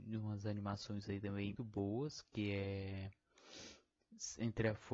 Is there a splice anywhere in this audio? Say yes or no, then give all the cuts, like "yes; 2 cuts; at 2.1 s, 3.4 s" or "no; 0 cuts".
yes; 1 cut; at 1.6 s